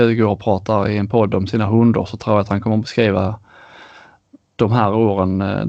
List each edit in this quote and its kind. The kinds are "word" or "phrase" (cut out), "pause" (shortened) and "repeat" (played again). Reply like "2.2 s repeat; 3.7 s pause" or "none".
none